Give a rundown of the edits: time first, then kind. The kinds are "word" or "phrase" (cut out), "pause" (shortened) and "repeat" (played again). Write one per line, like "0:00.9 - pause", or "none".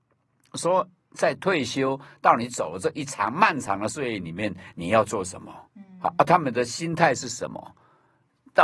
0:05.7 - pause